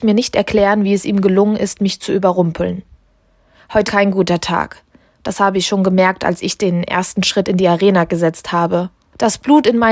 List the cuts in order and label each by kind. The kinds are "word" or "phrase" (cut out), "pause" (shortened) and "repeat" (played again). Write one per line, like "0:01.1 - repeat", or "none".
0:03.9 - word